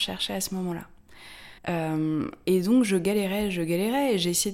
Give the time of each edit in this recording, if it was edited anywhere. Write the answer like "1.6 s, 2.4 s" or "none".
1.6 s